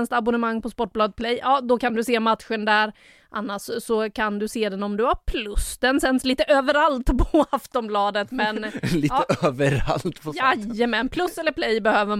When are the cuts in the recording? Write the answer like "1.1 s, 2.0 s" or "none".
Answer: none